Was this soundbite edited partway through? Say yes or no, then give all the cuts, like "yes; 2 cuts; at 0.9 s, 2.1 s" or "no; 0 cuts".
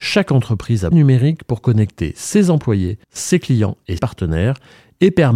yes; 3 cuts; at 0.9 s, 3.0 s, 4.0 s